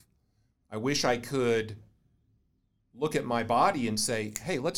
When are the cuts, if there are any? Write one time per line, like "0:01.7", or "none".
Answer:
none